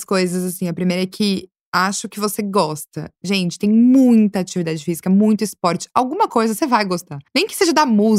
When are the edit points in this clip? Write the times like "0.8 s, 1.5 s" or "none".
7.3 s